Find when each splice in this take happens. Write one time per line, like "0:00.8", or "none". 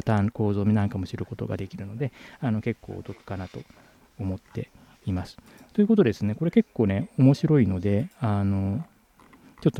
none